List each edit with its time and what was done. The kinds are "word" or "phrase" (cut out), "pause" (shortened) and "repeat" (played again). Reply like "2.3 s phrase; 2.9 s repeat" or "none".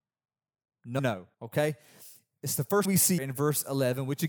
1.0 s word; 1.3 s pause; 2.8 s word; 3.2 s word